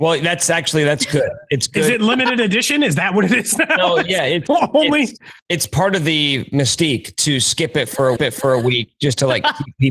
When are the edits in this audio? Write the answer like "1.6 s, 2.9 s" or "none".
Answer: 4.5 s, 5.4 s, 8.2 s